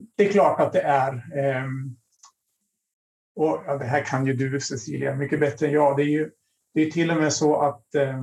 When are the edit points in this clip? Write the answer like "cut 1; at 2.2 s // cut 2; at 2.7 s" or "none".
none